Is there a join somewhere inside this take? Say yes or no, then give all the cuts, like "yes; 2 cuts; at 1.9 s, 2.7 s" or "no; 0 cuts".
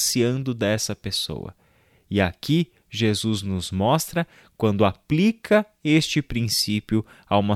no; 0 cuts